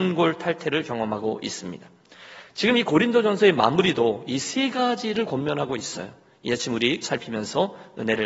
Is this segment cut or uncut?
cut